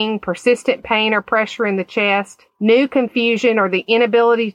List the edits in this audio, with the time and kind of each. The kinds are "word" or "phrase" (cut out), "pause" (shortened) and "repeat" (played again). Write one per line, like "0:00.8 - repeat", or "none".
0:02.5 - pause